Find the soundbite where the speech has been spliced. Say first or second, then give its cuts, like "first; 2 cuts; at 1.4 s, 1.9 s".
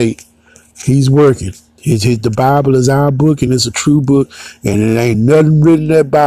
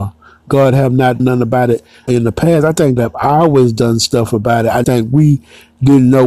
second; 4 cuts; at 1.2 s, 2.1 s, 3.0 s, 4.8 s